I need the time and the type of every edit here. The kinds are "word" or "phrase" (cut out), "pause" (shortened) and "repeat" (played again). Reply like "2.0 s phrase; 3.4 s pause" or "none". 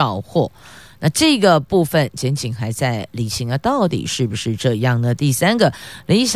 none